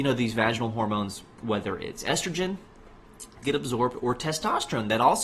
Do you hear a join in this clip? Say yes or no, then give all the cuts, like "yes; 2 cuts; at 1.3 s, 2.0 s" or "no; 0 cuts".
yes; 1 cut; at 3.4 s